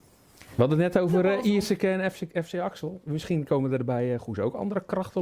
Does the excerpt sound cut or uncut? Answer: uncut